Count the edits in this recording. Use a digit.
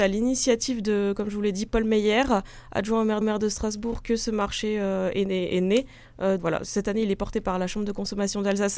2